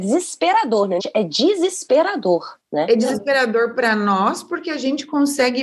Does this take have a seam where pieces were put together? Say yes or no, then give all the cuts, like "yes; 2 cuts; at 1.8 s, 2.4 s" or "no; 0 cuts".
yes; 2 cuts; at 1.0 s, 2.6 s